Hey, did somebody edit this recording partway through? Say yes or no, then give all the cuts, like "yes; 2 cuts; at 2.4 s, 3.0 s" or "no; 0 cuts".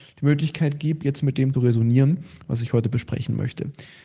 yes; 1 cut; at 1.5 s